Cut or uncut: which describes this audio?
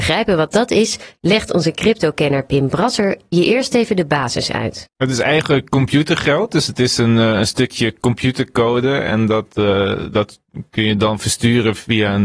uncut